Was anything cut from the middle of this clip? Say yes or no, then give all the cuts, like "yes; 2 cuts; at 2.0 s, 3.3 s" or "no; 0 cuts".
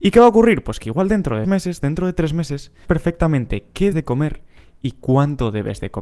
yes; 3 cuts; at 1.4 s, 2.8 s, 3.9 s